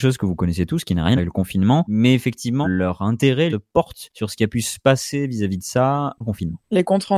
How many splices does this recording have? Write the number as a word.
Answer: four